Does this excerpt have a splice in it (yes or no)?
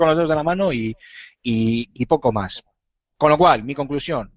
no